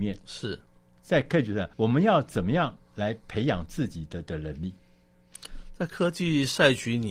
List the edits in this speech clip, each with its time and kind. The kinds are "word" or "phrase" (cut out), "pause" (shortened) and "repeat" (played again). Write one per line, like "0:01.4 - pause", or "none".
0:01.7 - pause

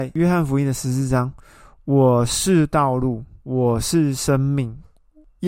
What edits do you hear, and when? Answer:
0:03.4 - pause

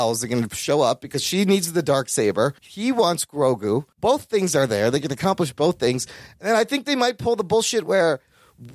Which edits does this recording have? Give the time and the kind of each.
0:02.6 - pause
0:03.9 - pause

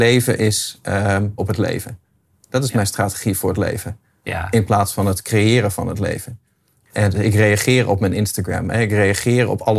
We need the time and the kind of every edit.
0:01.4 - word

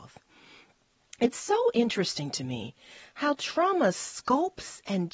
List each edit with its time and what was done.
none

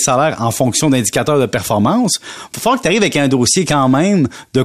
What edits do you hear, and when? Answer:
none

